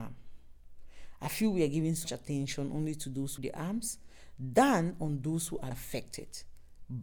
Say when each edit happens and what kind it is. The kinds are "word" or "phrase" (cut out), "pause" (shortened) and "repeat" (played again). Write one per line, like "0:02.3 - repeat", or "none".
0:02.0 - word
0:03.4 - word
0:05.7 - word